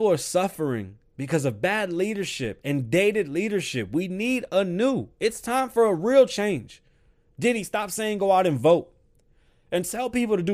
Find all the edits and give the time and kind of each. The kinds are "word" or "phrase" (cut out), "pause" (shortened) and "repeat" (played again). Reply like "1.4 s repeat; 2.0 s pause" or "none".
none